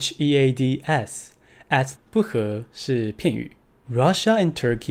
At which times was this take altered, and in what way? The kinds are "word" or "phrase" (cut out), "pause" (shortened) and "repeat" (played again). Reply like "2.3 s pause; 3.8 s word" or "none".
1.9 s word